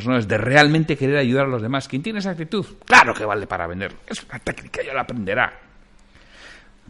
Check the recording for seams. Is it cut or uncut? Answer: uncut